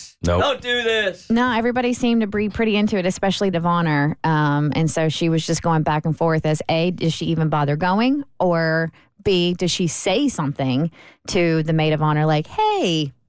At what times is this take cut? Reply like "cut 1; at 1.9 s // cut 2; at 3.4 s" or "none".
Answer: cut 1; at 3.5 s